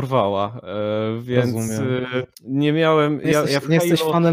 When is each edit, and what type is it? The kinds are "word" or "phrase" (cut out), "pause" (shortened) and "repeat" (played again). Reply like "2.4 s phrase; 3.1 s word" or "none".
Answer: 2.3 s pause